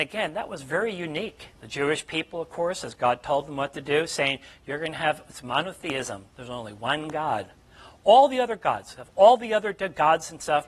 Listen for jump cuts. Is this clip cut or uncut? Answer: cut